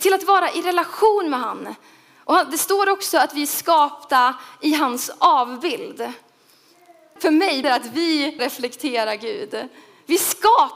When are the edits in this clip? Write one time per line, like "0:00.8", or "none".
0:07.2
0:07.6
0:08.4